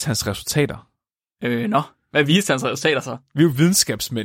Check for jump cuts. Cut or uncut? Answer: uncut